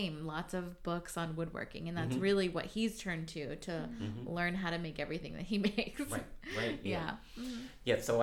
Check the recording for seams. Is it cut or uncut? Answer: uncut